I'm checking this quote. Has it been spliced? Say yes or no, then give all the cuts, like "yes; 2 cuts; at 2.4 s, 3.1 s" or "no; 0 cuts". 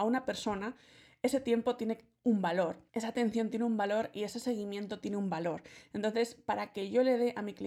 yes; 1 cut; at 2.9 s